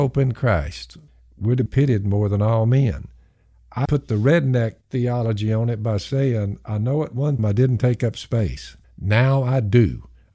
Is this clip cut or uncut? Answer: cut